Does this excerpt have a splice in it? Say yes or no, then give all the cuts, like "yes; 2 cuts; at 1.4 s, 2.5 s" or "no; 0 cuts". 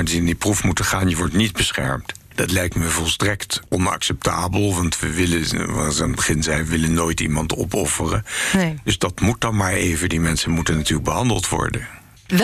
no; 0 cuts